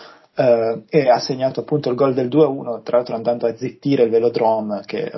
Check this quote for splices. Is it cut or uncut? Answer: uncut